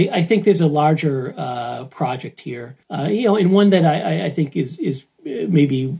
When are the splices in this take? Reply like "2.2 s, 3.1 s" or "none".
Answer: 2.8 s